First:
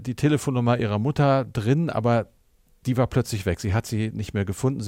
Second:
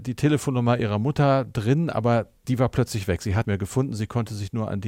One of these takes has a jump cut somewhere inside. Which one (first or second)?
second